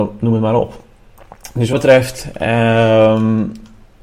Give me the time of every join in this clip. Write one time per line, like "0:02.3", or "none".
0:01.7